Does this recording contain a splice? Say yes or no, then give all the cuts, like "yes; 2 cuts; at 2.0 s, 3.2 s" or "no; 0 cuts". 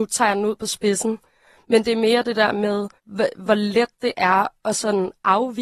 yes; 1 cut; at 3.0 s